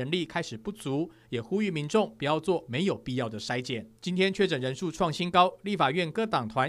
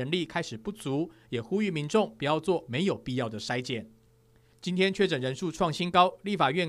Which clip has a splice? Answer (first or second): first